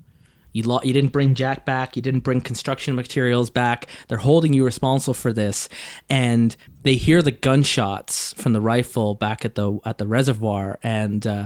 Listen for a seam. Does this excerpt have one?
no; 0 cuts

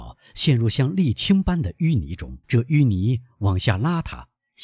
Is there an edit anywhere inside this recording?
yes; 1 cut; at 2.4 s

